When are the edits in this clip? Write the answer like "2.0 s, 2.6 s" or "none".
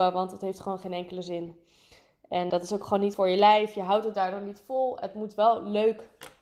2.5 s, 3.1 s